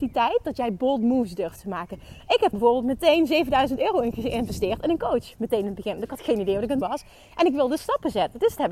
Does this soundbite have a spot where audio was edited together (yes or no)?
yes